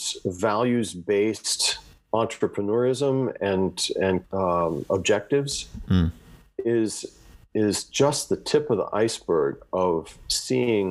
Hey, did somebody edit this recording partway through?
yes; 1 cut; at 4.2 s

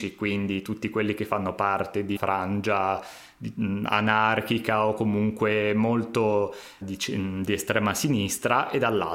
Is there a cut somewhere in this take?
yes; 2 cuts; at 2.2 s, 6.8 s

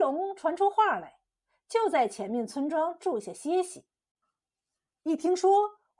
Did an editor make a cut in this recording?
no; 0 cuts

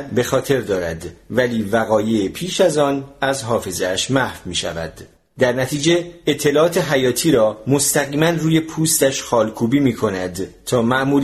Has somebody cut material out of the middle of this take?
no; 0 cuts

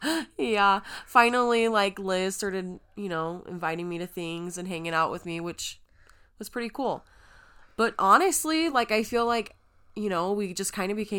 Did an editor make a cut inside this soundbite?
no; 0 cuts

